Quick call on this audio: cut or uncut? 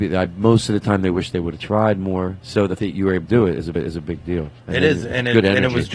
cut